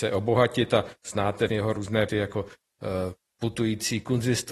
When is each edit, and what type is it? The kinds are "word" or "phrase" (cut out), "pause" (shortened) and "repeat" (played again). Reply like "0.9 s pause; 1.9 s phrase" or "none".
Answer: 1.5 s word; 2.1 s word